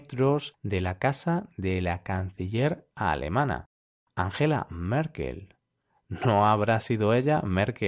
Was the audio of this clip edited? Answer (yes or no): no